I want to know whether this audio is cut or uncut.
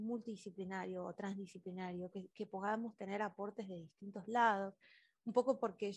uncut